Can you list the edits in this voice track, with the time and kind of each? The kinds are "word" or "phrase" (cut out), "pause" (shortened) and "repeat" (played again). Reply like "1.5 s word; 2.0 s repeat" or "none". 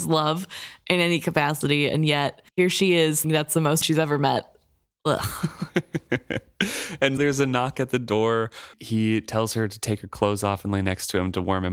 2.5 s pause; 3.2 s word; 3.8 s phrase; 7.2 s word; 8.7 s word